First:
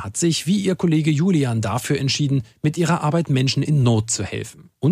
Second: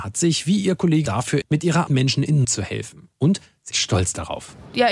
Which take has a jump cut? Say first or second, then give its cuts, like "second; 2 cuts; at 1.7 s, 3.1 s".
second; 5 cuts; at 1.1 s, 1.4 s, 1.9 s, 2.4 s, 3.7 s